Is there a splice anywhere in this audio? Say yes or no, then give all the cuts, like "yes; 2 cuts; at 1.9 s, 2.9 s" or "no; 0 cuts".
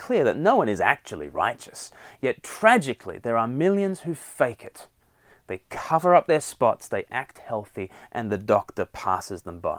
no; 0 cuts